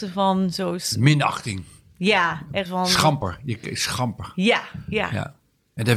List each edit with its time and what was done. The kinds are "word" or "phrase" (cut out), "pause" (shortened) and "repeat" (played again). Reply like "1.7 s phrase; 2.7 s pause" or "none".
2.7 s word